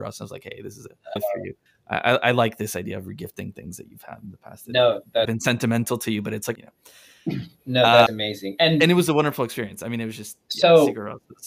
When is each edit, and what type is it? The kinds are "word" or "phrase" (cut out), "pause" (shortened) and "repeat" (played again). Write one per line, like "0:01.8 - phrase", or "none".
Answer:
0:01.2 - word
0:01.7 - pause
0:05.3 - phrase
0:06.6 - phrase
0:08.1 - phrase